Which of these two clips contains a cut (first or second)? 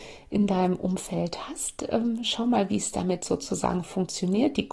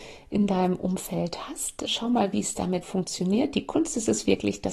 second